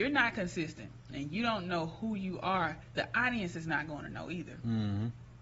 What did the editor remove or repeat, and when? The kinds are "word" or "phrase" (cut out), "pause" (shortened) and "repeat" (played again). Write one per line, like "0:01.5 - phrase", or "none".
0:02.8 - pause